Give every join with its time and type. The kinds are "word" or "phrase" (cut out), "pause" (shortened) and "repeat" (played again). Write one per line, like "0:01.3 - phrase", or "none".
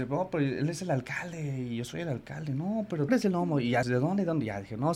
0:03.1 - word
0:03.8 - word